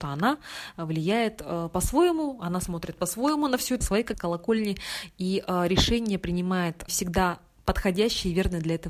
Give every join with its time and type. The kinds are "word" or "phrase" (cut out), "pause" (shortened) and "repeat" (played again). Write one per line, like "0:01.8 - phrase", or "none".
0:03.8 - phrase
0:04.1 - word
0:06.9 - word